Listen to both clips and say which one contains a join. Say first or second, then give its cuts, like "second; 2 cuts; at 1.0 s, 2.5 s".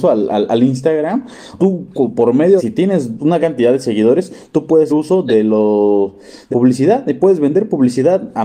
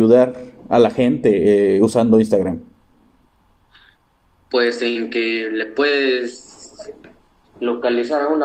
first; 5 cuts; at 1.6 s, 2.6 s, 3.4 s, 4.9 s, 6.5 s